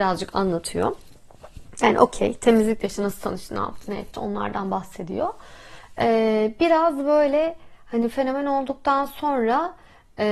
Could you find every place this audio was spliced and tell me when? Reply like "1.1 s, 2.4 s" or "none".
none

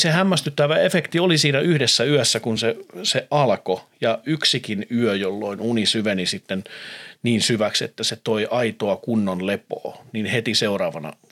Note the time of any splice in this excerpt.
none

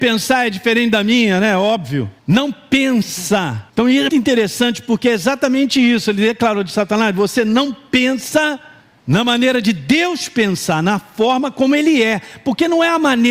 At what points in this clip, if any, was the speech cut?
2.2 s, 3.7 s, 4.1 s, 8.8 s

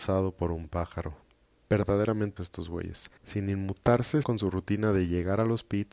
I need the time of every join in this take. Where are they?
2.4 s, 3.2 s, 4.2 s

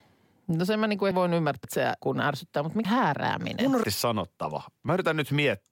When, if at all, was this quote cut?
1.1 s, 1.6 s, 2.0 s, 2.9 s, 3.8 s

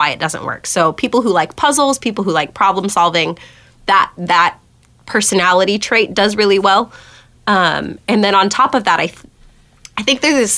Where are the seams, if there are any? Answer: none

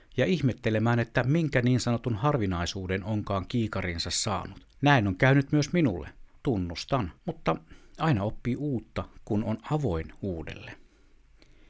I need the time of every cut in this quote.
4.7 s, 7.2 s

